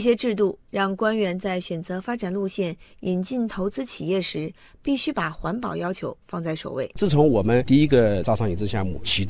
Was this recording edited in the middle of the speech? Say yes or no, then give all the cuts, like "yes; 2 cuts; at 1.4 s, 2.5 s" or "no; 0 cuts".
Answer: no; 0 cuts